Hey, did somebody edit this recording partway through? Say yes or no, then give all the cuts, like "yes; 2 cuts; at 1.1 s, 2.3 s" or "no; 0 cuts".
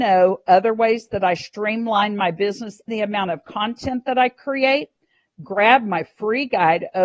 yes; 1 cut; at 2.9 s